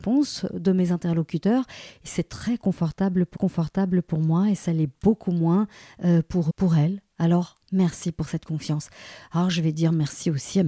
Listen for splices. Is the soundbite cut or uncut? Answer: cut